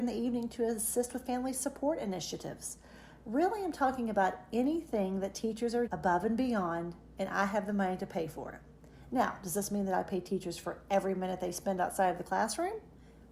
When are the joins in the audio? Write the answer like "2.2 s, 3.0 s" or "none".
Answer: 5.9 s